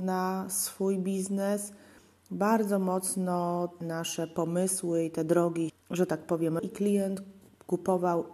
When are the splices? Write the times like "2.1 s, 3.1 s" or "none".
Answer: 3.8 s, 5.7 s, 6.6 s